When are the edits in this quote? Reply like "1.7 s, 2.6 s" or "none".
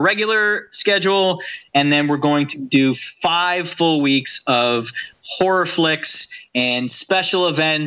none